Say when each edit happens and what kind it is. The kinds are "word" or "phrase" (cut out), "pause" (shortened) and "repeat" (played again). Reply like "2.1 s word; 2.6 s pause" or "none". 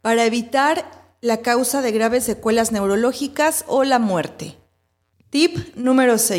none